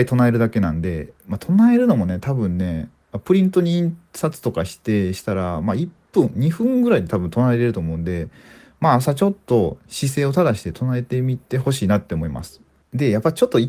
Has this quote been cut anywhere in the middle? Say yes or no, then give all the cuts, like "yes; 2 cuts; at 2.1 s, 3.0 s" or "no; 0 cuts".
no; 0 cuts